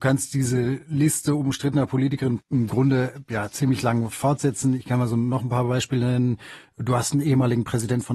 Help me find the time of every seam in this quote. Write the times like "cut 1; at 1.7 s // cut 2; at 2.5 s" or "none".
cut 1; at 2.4 s